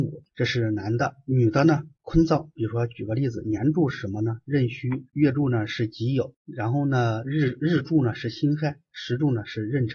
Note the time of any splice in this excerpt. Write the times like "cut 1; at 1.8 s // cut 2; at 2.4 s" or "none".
cut 1; at 5.1 s